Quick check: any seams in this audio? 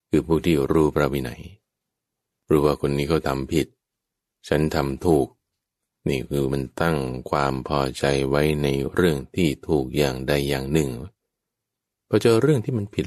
no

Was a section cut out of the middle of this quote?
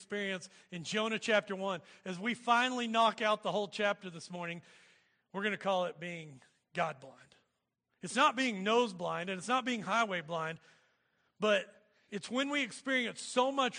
no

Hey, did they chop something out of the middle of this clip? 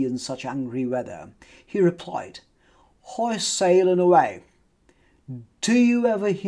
no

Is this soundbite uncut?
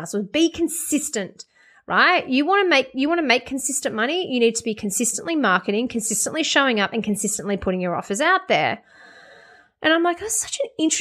yes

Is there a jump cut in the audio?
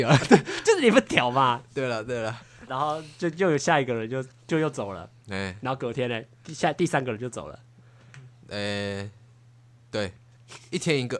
yes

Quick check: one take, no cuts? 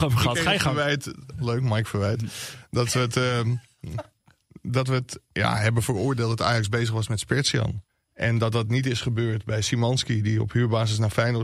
no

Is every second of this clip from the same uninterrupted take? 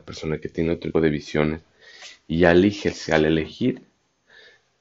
no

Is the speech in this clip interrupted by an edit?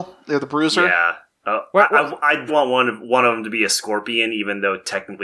yes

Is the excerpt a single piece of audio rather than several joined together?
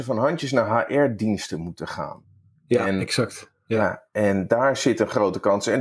yes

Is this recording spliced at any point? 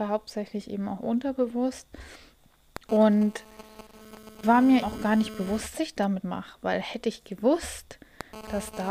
yes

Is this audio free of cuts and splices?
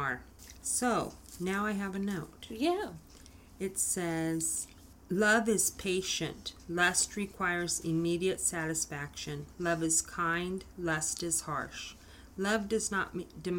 yes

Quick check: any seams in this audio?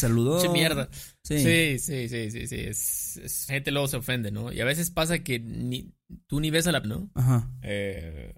yes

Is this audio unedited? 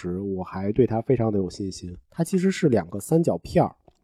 no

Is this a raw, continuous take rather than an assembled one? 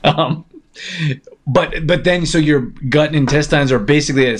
yes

